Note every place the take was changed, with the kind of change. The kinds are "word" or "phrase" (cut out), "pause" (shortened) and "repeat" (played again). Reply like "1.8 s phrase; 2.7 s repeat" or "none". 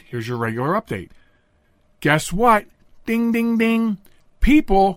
none